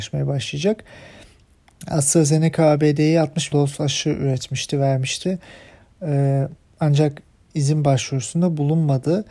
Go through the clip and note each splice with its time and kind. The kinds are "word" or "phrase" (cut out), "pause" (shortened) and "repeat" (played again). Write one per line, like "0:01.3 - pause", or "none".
0:03.5 - word
0:07.5 - word